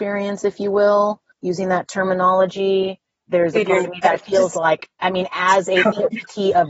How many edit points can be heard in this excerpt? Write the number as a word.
zero